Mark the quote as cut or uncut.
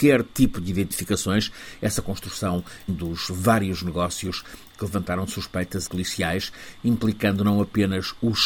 cut